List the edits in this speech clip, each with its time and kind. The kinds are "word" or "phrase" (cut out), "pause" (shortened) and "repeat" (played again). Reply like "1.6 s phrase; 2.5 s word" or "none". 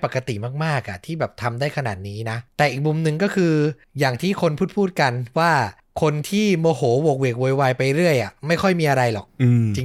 2.5 s pause